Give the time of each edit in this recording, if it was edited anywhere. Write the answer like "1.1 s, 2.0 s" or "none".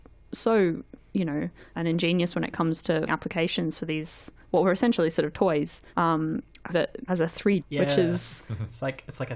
1.7 s, 3.1 s, 5.9 s, 6.7 s, 7.1 s, 7.6 s